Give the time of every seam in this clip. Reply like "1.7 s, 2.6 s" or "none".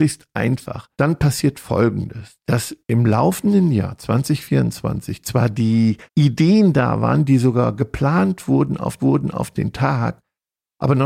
0.9 s, 2.8 s, 6.1 s, 9.0 s